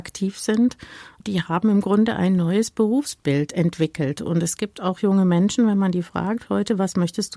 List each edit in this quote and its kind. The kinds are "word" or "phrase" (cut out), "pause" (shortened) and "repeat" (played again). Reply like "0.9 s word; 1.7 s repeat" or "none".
none